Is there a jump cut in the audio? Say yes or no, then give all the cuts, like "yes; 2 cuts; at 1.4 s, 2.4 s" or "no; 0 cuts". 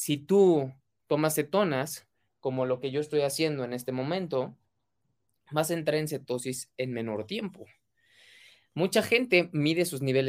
no; 0 cuts